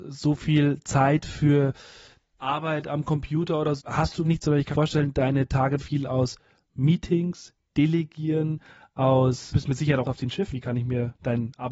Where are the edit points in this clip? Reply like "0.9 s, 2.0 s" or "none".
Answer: 2.3 s, 3.8 s, 4.2 s, 4.7 s, 5.8 s, 9.5 s, 10.0 s, 10.5 s